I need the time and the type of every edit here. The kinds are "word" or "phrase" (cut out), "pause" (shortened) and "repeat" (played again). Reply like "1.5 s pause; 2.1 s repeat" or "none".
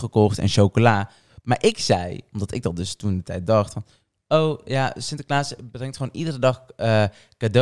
none